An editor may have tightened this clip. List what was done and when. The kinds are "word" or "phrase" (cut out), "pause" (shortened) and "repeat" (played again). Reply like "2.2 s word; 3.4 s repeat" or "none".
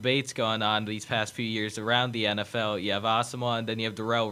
none